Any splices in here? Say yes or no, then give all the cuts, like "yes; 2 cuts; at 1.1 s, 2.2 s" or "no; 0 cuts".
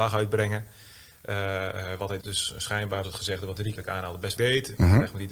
yes; 4 cuts; at 2.2 s, 3.0 s, 3.8 s, 4.4 s